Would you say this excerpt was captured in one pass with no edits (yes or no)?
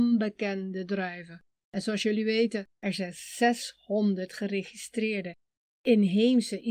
yes